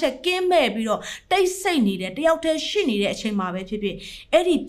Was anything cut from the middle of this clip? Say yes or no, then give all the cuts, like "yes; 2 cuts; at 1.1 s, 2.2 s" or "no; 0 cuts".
no; 0 cuts